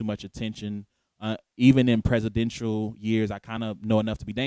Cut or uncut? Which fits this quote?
uncut